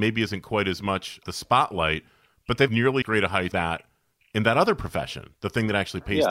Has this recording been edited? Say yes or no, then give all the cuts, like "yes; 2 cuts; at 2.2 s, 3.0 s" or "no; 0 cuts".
yes; 4 cuts; at 1.2 s, 2.7 s, 3.0 s, 3.5 s